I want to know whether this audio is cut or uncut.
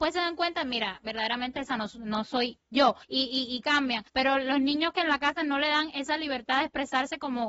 cut